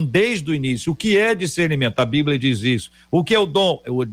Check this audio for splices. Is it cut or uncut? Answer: uncut